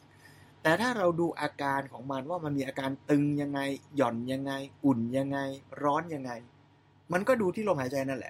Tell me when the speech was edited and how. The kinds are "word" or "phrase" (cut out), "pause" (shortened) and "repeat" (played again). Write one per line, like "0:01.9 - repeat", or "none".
none

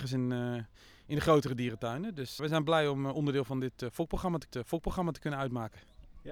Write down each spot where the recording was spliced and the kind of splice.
0:02.4 - word
0:04.5 - repeat

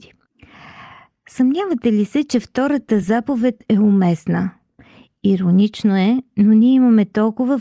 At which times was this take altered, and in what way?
none

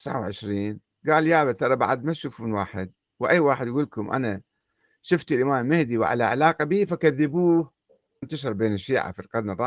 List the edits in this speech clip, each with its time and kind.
0:08.2 - word

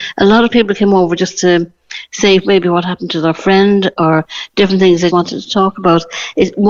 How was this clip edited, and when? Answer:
0:05.1 - word

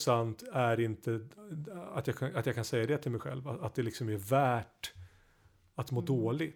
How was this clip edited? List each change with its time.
none

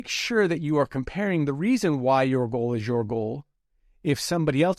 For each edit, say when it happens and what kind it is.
none

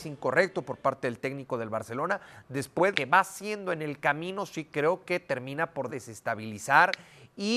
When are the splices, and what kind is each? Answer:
0:02.9 - word
0:05.9 - word

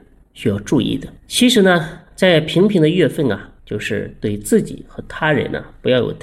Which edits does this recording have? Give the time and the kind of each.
0:01.2 - pause
0:03.6 - pause

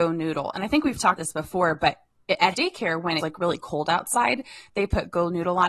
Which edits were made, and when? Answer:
0:01.2 - word
0:02.5 - word
0:03.2 - word

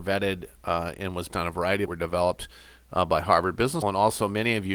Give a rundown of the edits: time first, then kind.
0:01.3 - word
0:01.9 - phrase
0:03.8 - word

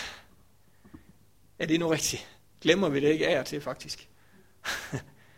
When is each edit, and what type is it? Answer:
none

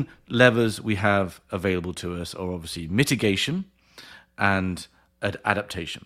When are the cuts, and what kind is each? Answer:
none

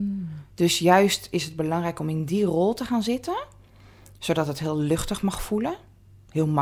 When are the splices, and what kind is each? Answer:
none

